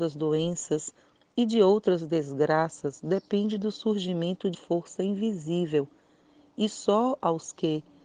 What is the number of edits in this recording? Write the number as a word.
one